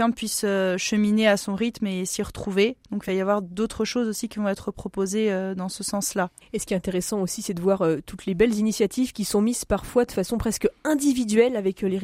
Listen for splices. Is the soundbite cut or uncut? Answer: uncut